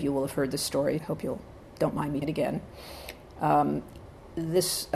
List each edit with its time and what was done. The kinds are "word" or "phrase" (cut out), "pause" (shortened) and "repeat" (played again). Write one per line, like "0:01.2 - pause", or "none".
0:01.0 - word
0:02.2 - word